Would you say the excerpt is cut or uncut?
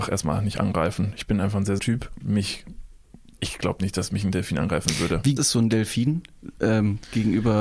cut